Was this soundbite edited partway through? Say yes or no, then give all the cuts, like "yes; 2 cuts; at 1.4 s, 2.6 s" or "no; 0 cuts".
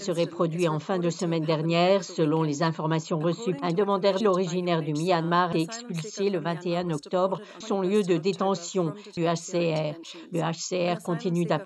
yes; 4 cuts; at 4.2 s, 5.5 s, 7.6 s, 9.2 s